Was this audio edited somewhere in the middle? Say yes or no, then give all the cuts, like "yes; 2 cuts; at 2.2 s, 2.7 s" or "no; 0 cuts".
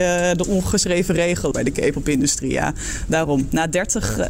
yes; 1 cut; at 1.5 s